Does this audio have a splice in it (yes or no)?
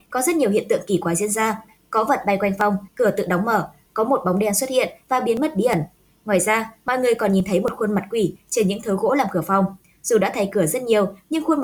no